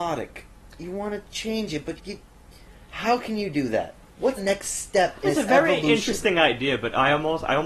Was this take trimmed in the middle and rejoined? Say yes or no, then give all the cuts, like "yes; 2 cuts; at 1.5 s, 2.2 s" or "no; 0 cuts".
yes; 3 cuts; at 2.0 s, 4.4 s, 5.2 s